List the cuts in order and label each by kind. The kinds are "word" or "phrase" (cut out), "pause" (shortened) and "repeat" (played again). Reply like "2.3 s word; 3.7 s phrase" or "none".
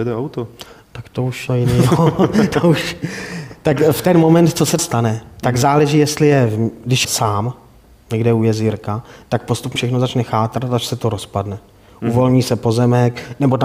1.5 s word; 4.8 s word; 7.0 s word; 9.8 s word